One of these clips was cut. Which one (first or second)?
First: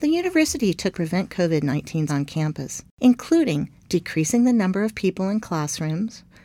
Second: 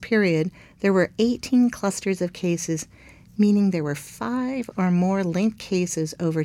first